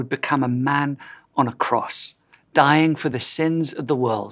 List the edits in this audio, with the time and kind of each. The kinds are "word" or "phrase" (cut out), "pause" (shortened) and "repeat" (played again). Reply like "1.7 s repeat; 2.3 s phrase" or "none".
none